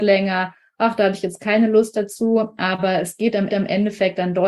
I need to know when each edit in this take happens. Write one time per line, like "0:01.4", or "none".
0:03.5